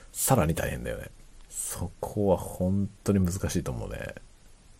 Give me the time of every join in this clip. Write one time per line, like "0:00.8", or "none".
0:01.4